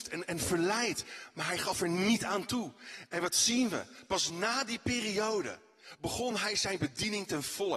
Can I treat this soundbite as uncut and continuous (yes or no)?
yes